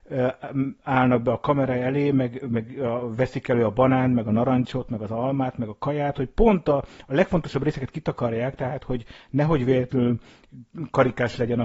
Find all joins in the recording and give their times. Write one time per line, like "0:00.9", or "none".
none

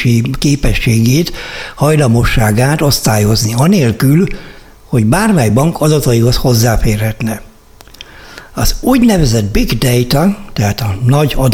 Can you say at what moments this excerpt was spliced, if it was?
none

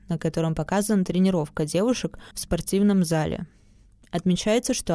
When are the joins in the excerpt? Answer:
0:02.3

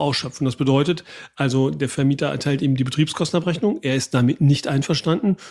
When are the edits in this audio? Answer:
none

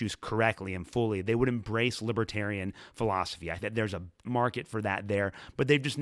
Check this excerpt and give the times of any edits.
0:03.6
0:04.2

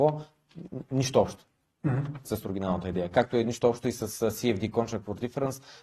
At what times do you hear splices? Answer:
none

